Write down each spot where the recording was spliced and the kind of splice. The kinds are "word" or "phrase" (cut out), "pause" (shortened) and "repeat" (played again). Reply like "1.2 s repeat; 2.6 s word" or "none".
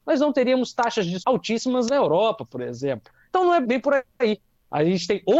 1.2 s word; 3.6 s word